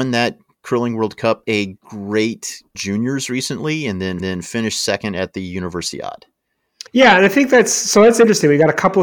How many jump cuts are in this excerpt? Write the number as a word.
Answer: four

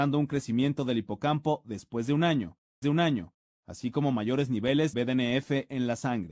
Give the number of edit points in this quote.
two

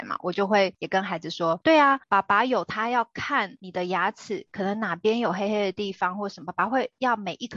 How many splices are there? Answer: one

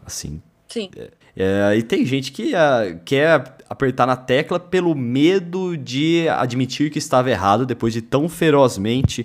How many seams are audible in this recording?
one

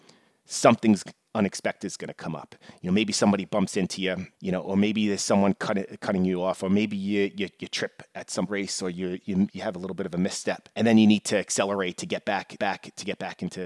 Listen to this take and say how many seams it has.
four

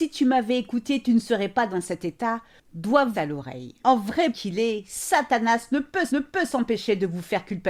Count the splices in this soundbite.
four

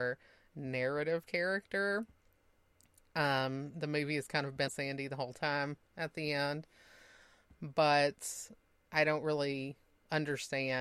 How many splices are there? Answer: one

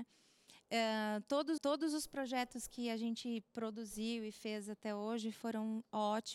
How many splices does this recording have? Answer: one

